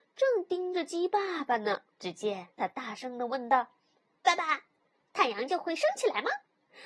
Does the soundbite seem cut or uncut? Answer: cut